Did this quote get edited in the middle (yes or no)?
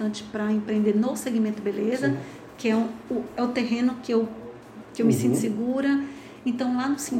no